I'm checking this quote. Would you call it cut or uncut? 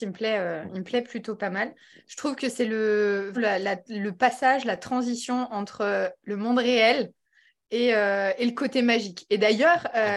cut